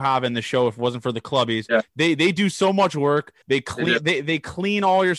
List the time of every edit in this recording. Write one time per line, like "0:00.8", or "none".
0:03.4